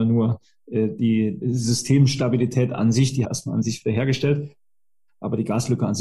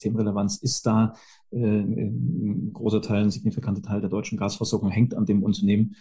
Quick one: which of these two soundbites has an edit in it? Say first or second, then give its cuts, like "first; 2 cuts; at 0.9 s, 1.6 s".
first; 2 cuts; at 1.4 s, 3.2 s